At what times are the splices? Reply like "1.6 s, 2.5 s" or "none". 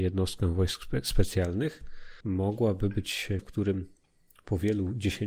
2.2 s, 3.4 s